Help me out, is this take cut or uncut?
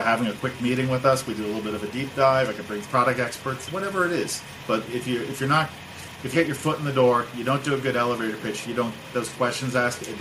cut